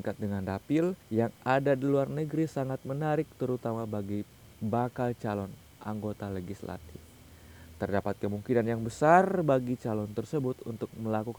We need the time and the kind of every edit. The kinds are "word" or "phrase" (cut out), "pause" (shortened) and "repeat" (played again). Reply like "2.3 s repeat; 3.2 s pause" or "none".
1.0 s pause